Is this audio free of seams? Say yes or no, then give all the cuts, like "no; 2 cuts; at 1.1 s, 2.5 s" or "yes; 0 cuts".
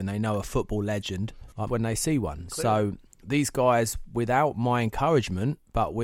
no; 1 cut; at 1.7 s